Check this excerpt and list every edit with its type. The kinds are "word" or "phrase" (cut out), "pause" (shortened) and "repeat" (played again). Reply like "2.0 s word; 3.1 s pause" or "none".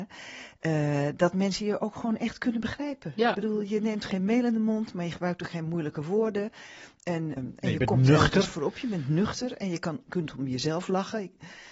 7.4 s word